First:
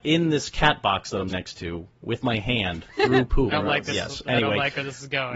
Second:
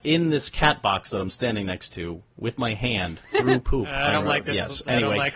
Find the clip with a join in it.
first; 2 cuts; at 1.3 s, 3.5 s

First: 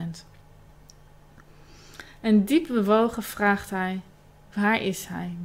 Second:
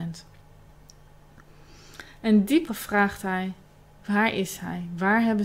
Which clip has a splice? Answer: second; 1 cut; at 2.7 s

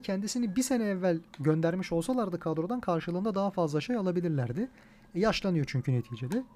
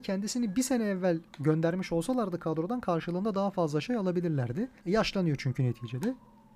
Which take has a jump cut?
second; 1 cut; at 4.8 s

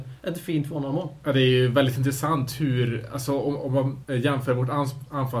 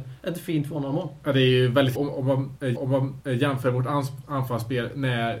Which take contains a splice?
second; 2 cuts; at 1.9 s, 2.7 s

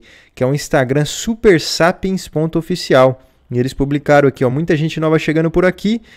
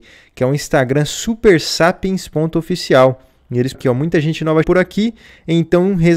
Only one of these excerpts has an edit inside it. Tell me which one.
second; 2 cuts; at 3.7 s, 4.6 s

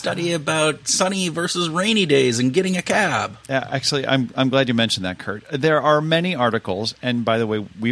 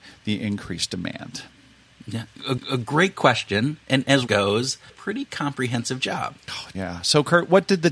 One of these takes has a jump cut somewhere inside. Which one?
second; 4 cuts; at 2.6 s, 4.3 s, 4.9 s, 6.7 s

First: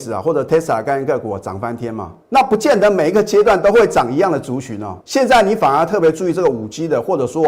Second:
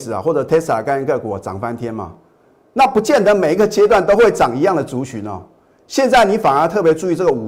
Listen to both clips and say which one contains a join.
first; 2 cuts; at 2.2 s, 5.0 s

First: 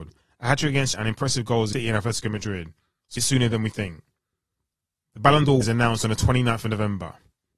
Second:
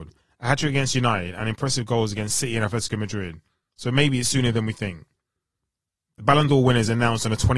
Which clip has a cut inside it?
first; 4 cuts; at 0.9 s, 1.7 s, 3.2 s, 5.6 s

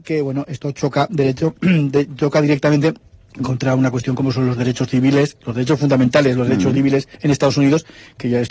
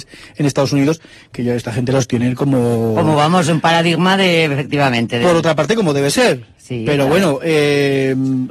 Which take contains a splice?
first; 2 cuts; at 3.1 s, 7.1 s

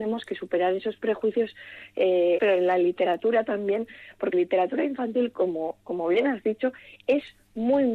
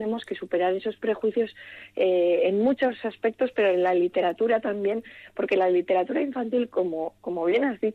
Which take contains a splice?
first; 2 cuts; at 2.4 s, 4.3 s

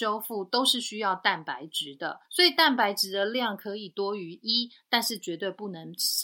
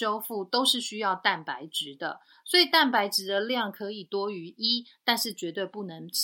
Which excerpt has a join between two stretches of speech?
first; 1 cut; at 2.2 s

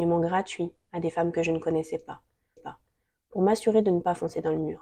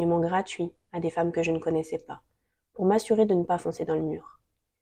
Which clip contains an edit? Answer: first; 1 cut; at 2.6 s

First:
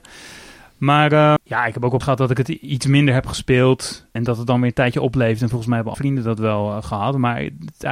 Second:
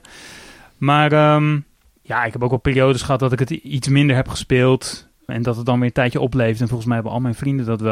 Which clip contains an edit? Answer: first; 4 cuts; at 1.4 s, 2.0 s, 4.2 s, 5.9 s

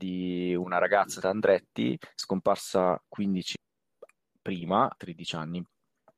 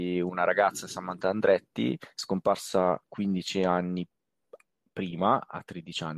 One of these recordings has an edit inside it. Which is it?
first; 3 cuts; at 1.2 s, 3.5 s, 4.9 s

